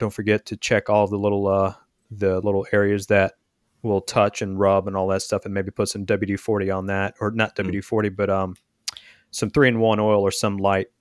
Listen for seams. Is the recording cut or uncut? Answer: uncut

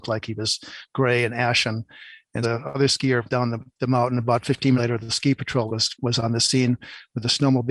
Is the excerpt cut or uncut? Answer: cut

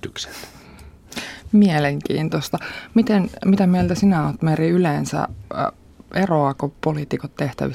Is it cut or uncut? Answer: uncut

